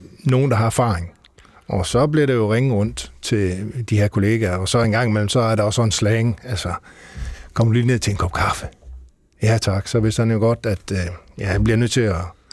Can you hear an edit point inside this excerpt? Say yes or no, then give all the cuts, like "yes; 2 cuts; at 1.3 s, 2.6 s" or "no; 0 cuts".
no; 0 cuts